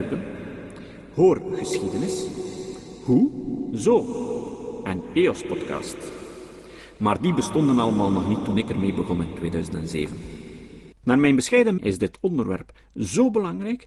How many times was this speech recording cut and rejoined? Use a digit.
2